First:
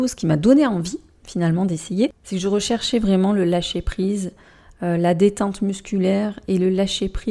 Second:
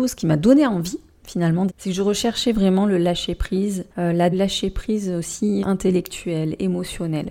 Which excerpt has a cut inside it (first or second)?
second